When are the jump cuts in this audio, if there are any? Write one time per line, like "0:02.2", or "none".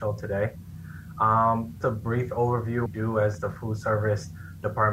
0:01.8
0:02.9

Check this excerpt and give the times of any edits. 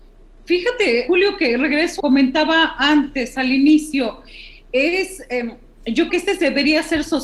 0:01.1
0:02.0
0:06.1

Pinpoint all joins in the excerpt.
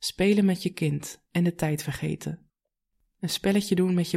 none

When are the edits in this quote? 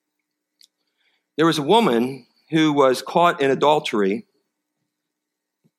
none

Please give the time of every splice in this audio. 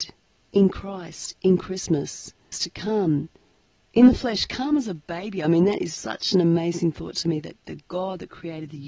0:02.5
0:06.0
0:07.6

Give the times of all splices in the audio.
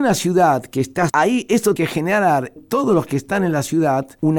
0:01.1
0:01.8
0:02.6

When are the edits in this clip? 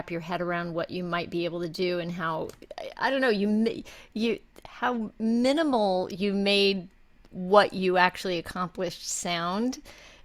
none

